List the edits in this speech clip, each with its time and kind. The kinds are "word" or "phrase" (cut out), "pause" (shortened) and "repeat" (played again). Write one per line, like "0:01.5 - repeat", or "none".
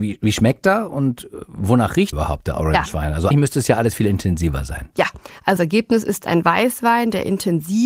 0:02.1 - word
0:03.3 - word
0:05.6 - word